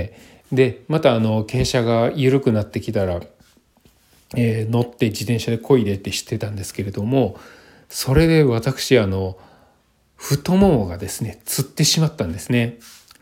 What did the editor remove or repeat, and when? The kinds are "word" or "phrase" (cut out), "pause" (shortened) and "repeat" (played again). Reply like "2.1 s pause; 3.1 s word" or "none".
none

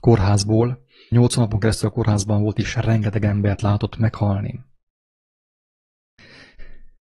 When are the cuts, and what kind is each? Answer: 1.1 s word

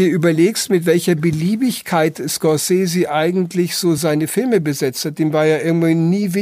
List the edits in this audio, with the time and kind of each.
none

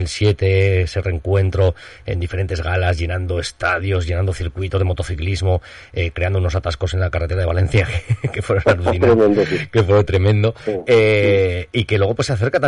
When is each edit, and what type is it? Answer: none

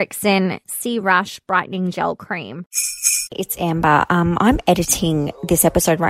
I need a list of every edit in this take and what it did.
none

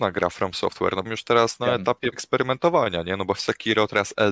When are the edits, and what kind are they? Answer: 1.1 s phrase; 2.1 s word; 3.4 s word

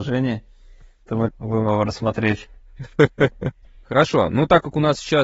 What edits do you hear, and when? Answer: 1.3 s word; 3.7 s pause

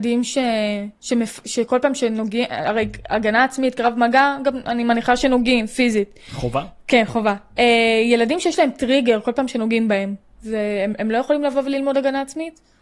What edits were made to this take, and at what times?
1.0 s pause

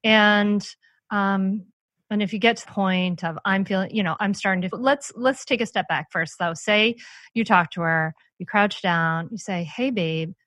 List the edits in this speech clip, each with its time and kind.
2.6 s word; 4.2 s word; 4.7 s phrase

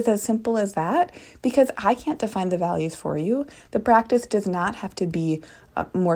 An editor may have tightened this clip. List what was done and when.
none

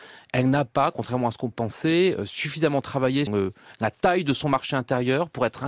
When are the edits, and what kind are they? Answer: 1.5 s word; 3.3 s word

